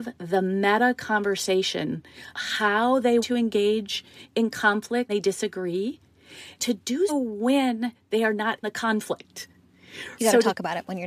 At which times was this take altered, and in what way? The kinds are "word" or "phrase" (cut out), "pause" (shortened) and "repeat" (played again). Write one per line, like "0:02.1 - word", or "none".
0:02.3 - word
0:03.2 - word
0:05.1 - word
0:06.6 - word
0:07.1 - word
0:08.6 - word
0:10.2 - word